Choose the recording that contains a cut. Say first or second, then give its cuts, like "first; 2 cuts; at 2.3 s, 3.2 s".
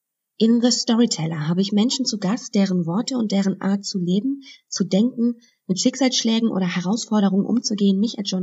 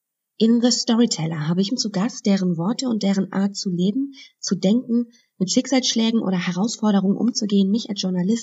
second; 1 cut; at 1.7 s